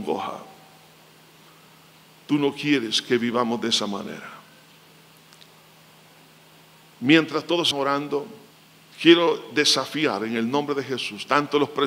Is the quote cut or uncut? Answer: cut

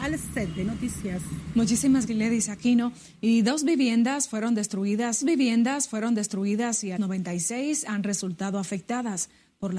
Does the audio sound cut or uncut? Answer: cut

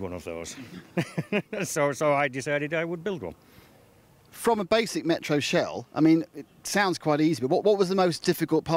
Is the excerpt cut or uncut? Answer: uncut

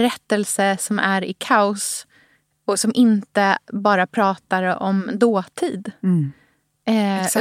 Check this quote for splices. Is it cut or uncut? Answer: uncut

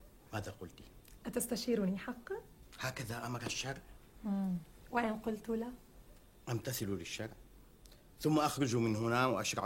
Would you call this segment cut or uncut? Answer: uncut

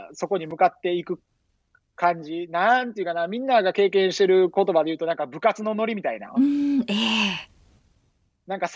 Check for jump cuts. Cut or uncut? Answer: uncut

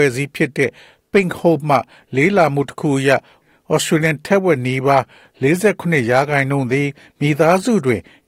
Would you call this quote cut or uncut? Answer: uncut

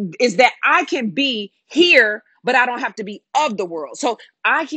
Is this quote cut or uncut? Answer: uncut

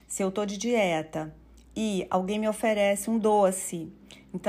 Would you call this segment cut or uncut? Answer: uncut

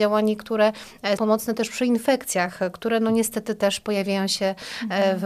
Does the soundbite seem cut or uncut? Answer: cut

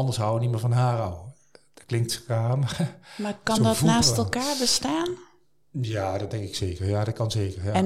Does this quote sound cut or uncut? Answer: uncut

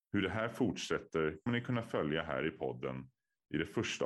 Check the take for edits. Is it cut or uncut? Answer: cut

